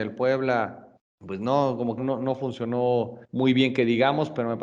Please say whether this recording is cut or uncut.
cut